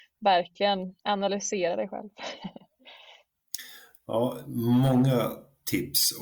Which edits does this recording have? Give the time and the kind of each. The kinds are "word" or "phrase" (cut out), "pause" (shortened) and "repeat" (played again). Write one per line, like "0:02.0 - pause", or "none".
0:01.0 - pause